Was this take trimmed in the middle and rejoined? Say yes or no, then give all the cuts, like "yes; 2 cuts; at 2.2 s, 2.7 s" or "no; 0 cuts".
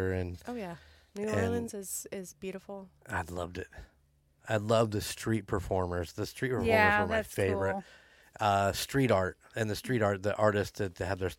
no; 0 cuts